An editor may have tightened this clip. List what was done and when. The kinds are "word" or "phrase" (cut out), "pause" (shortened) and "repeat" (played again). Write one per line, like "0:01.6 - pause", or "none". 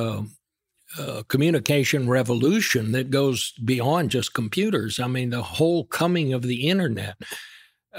none